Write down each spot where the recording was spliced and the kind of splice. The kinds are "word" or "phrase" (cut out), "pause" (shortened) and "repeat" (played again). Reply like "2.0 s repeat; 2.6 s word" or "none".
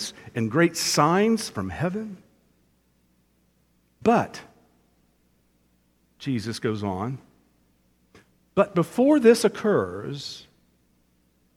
none